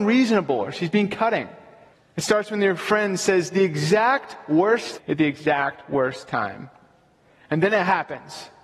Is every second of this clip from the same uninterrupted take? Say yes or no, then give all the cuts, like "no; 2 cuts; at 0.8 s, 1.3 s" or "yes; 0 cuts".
no; 2 cuts; at 1.9 s, 5.0 s